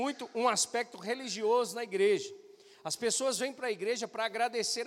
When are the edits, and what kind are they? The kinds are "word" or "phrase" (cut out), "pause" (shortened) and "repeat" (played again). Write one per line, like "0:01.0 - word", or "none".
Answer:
none